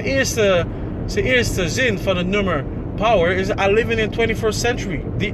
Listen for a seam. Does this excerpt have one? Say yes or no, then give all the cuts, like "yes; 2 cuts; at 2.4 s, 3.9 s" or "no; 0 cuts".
no; 0 cuts